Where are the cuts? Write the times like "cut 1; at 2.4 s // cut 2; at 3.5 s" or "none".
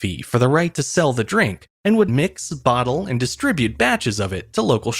cut 1; at 2.1 s